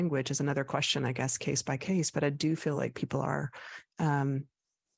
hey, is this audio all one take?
yes; 0 cuts

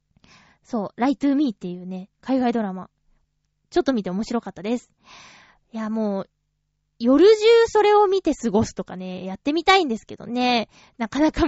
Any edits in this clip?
no; 0 cuts

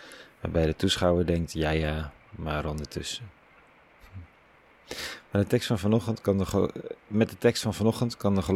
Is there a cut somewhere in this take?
no; 0 cuts

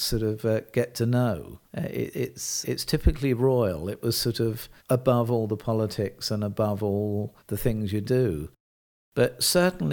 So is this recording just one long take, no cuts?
no; 6 cuts; at 1.6 s, 2.1 s, 2.6 s, 4.8 s, 7.4 s, 8.0 s

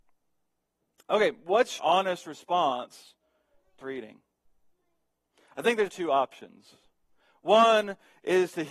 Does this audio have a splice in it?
yes; 3 cuts; at 1.8 s, 3.8 s, 5.9 s

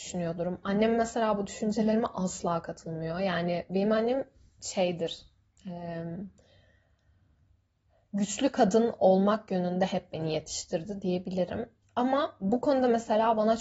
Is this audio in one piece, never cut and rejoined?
yes; 0 cuts

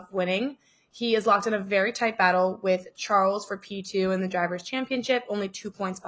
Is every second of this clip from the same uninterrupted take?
yes; 0 cuts

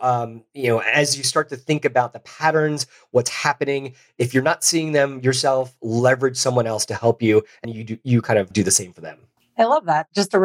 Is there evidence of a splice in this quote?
yes; 3 cuts; at 7.6 s, 8.5 s, 9.4 s

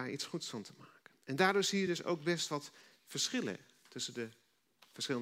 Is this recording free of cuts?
yes; 0 cuts

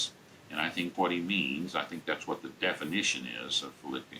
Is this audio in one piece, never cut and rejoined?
no; 1 cut; at 0.9 s

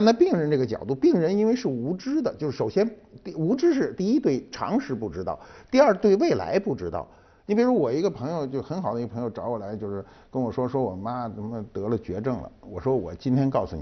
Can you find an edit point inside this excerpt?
no; 0 cuts

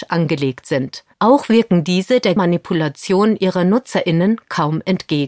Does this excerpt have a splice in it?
yes; 2 cuts; at 1.1 s, 2.4 s

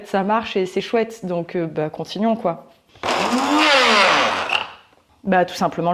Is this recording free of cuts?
yes; 0 cuts

